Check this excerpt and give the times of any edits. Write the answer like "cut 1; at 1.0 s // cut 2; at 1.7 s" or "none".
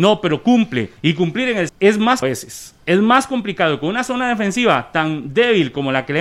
cut 1; at 1.0 s // cut 2; at 1.7 s // cut 3; at 2.2 s